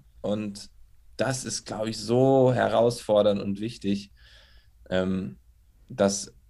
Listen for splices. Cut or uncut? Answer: uncut